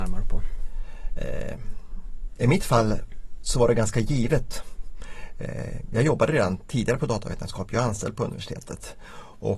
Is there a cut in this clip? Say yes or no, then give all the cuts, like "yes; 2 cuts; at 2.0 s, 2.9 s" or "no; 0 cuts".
no; 0 cuts